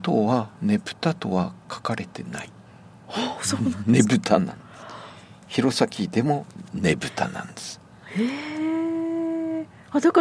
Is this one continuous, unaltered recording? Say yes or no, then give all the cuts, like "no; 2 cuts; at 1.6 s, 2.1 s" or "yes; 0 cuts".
yes; 0 cuts